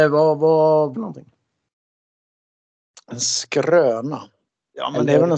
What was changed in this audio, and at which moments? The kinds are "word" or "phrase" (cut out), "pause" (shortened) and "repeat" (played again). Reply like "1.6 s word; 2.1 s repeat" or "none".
0.9 s phrase